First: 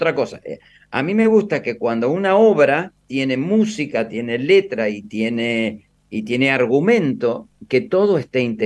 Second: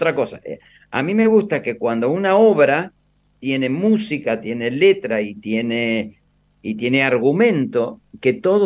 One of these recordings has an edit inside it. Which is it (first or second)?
first